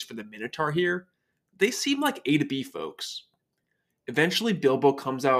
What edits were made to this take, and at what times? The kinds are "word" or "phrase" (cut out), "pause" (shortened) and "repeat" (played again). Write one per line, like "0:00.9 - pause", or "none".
none